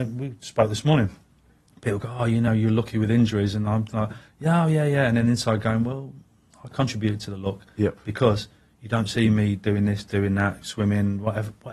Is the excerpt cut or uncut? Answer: uncut